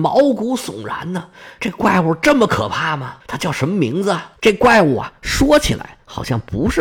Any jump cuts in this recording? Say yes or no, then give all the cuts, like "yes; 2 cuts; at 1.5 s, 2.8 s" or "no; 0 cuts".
yes; 2 cuts; at 3.2 s, 4.4 s